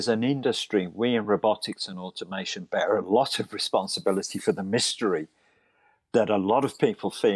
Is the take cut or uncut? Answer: uncut